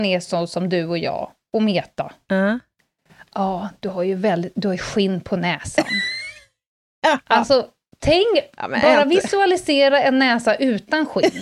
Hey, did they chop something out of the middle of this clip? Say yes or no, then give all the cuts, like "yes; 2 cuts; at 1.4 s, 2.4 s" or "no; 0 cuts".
no; 0 cuts